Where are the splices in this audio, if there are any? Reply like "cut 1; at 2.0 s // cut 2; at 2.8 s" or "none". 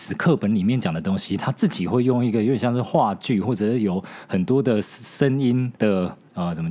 cut 1; at 5.8 s